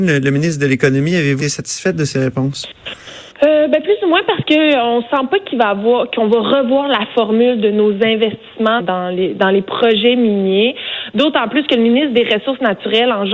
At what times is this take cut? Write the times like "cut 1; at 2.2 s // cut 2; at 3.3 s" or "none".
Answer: cut 1; at 1.4 s // cut 2; at 3.3 s // cut 3; at 8.8 s